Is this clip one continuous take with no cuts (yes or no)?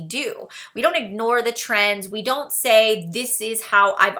yes